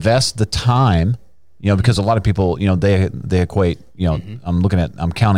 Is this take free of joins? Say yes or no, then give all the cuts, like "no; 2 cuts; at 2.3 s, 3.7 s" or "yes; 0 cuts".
yes; 0 cuts